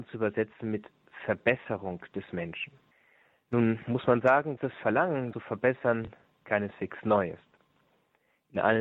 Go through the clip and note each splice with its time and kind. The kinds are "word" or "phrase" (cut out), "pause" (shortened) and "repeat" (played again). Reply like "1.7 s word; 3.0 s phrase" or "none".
2.9 s pause; 4.6 s word; 5.3 s phrase